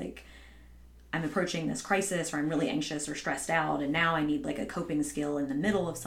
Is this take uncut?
yes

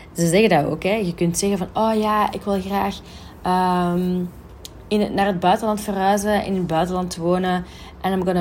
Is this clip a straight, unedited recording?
yes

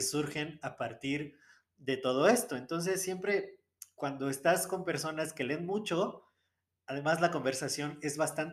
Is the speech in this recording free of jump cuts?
yes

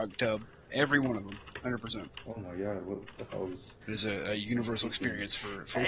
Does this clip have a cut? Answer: yes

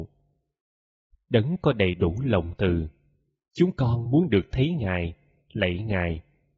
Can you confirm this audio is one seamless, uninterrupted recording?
yes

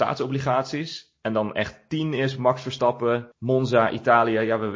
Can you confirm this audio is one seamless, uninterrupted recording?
no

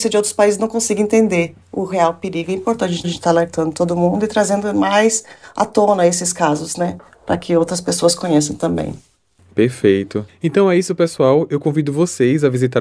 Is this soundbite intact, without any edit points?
no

